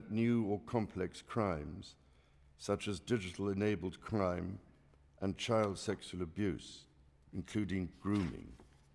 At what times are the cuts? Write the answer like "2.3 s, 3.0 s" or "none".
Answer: none